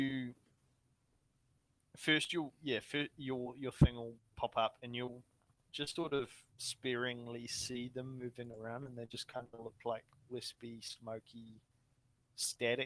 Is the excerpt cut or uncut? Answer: cut